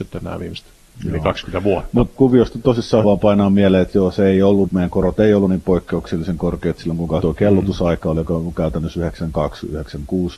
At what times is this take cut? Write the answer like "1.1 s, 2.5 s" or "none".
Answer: 2.2 s, 3.0 s, 4.7 s, 7.2 s